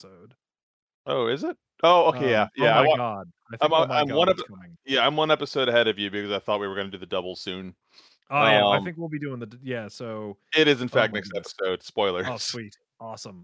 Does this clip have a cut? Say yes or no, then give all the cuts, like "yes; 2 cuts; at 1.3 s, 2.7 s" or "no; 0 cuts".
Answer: no; 0 cuts